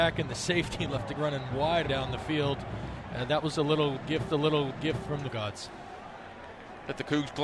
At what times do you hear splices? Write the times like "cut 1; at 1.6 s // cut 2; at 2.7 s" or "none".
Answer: cut 1; at 1.2 s // cut 2; at 1.8 s // cut 3; at 4.3 s // cut 4; at 5.3 s

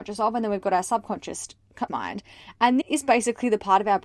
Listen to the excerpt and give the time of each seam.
cut 1; at 1.9 s // cut 2; at 2.8 s

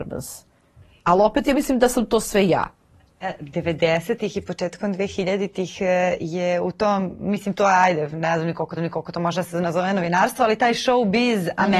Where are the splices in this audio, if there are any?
cut 1; at 8.8 s

